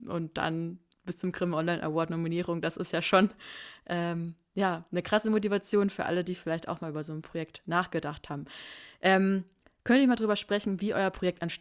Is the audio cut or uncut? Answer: uncut